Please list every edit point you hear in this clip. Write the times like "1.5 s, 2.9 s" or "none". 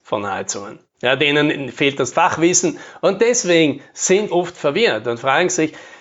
2.1 s, 4.3 s